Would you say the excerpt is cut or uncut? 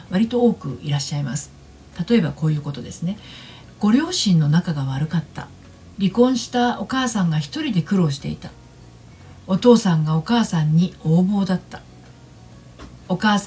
cut